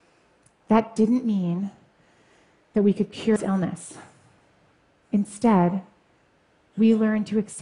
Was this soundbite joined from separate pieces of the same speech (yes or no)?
yes